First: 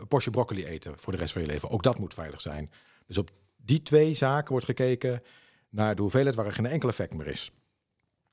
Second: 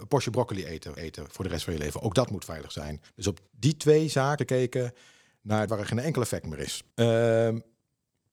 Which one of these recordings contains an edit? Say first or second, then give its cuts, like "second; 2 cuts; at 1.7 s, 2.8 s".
second; 6 cuts; at 1.0 s, 3.1 s, 3.5 s, 4.4 s, 5.7 s, 6.9 s